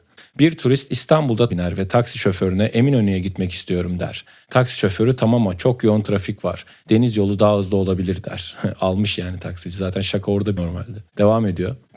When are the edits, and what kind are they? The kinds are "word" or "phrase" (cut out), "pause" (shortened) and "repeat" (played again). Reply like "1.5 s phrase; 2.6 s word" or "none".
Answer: 1.5 s word; 10.6 s word; 11.1 s pause